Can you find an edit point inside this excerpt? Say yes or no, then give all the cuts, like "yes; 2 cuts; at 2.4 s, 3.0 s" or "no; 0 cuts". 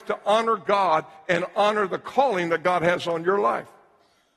no; 0 cuts